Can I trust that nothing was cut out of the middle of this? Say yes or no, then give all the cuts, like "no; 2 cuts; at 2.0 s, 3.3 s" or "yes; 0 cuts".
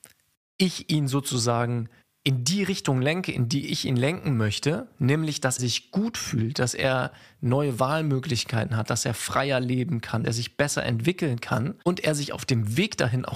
no; 4 cuts; at 2.0 s, 5.6 s, 10.2 s, 11.8 s